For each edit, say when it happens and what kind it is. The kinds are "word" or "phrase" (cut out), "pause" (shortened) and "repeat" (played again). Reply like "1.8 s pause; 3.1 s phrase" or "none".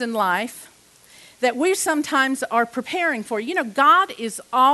none